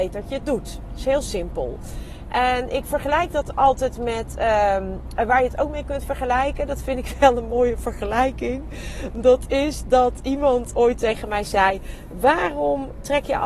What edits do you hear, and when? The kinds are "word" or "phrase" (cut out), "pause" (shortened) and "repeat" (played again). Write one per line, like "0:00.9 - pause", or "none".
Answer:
none